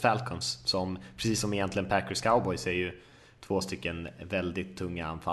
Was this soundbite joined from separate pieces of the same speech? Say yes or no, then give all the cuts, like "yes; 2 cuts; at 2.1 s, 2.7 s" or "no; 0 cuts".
no; 0 cuts